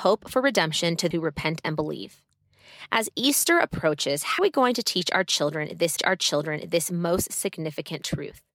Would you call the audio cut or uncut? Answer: cut